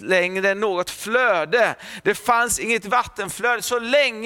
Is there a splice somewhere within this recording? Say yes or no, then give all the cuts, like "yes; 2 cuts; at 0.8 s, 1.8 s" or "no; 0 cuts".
no; 0 cuts